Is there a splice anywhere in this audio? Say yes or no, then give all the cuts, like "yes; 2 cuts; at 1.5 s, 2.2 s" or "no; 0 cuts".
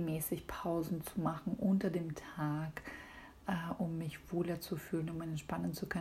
no; 0 cuts